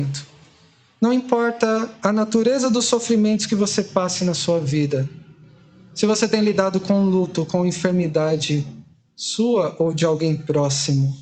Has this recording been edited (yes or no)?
no